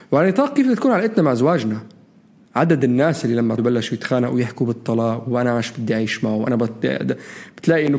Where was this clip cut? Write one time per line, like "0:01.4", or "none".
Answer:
0:03.6